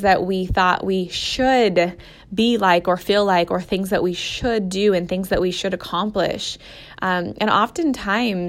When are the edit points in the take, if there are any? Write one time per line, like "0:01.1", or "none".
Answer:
none